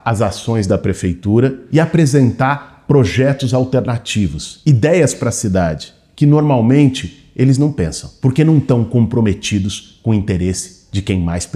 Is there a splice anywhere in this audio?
no; 0 cuts

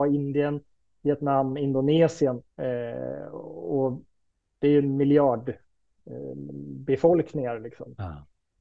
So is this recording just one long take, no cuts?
no; 2 cuts; at 2.5 s, 6.5 s

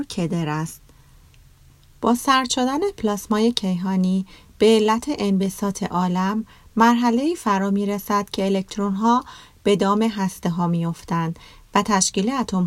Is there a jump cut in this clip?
no; 0 cuts

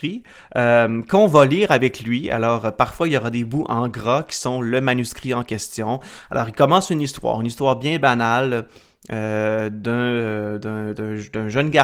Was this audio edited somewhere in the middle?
no; 0 cuts

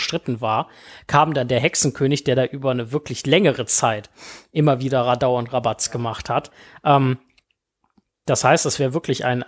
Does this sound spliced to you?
no; 0 cuts

